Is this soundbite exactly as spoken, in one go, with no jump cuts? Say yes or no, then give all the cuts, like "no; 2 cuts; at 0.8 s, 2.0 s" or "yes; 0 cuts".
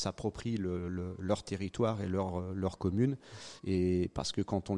no; 1 cut; at 3.6 s